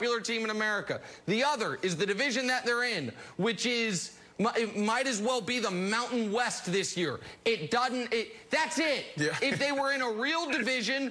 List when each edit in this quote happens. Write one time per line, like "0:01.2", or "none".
none